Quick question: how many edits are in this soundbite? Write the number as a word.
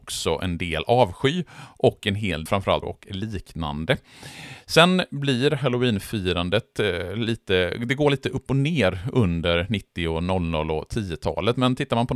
two